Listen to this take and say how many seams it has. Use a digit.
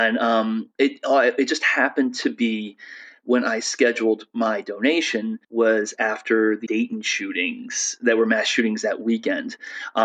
2